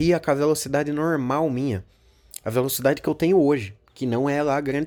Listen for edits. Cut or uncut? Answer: uncut